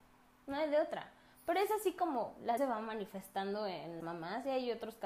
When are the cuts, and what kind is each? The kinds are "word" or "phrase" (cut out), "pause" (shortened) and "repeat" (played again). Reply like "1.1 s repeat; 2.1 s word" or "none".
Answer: 2.6 s word; 4.0 s word